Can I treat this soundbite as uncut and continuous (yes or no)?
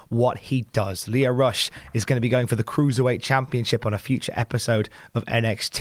yes